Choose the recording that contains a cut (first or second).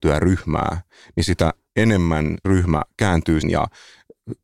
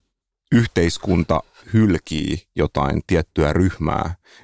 first